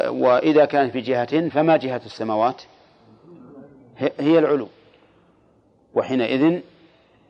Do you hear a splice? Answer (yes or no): no